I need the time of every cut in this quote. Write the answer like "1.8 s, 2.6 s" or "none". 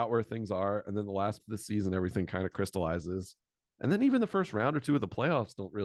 1.4 s